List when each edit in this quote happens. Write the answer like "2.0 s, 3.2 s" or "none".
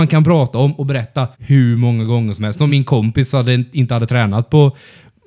1.3 s, 2.7 s